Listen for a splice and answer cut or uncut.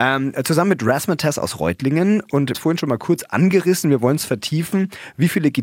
cut